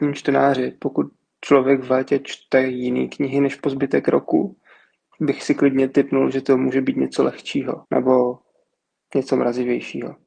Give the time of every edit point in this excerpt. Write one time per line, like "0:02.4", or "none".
0:05.1
0:07.8